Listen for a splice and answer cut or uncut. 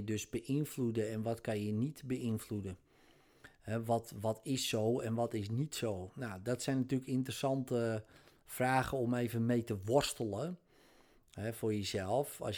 uncut